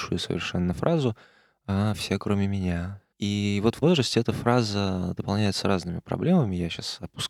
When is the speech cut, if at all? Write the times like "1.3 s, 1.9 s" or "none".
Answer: 3.1 s, 3.8 s